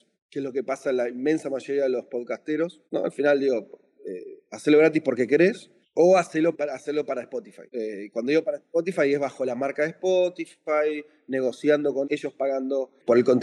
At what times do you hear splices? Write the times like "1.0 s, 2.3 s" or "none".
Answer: 2.9 s, 7.7 s, 12.0 s